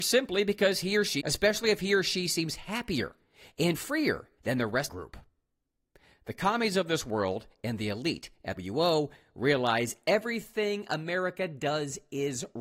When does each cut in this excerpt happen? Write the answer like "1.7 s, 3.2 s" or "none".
1.2 s, 3.7 s, 4.4 s, 4.9 s, 8.6 s